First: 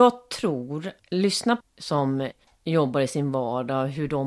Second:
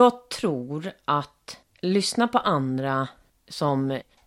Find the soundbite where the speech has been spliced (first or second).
first